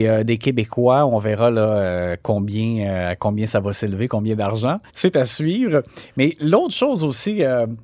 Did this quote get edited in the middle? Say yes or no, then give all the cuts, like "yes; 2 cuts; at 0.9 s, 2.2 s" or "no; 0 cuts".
yes; 1 cut; at 4.9 s